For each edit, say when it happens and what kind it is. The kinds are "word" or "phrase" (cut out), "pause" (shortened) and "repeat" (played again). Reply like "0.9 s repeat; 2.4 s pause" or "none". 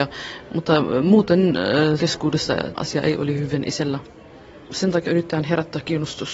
2.0 s word; 2.8 s word; 5.1 s word